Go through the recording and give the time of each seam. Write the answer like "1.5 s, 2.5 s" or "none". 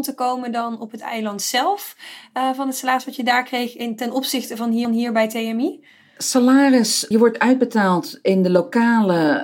4.8 s, 7.1 s